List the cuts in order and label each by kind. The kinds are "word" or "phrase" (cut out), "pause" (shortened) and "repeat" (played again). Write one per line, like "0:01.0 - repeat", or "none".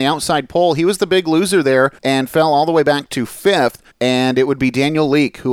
0:02.0 - pause
0:03.9 - pause